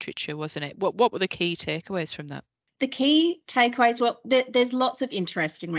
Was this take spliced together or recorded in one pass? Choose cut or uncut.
uncut